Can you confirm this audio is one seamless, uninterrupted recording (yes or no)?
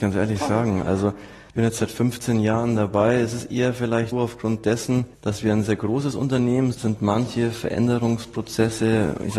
no